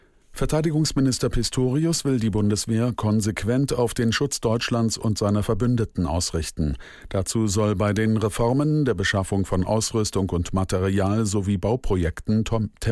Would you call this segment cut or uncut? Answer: uncut